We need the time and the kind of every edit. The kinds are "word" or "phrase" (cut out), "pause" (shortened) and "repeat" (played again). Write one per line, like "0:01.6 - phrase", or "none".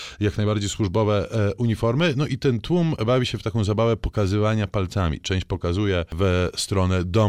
none